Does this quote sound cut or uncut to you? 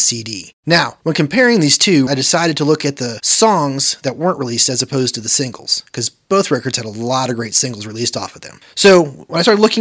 cut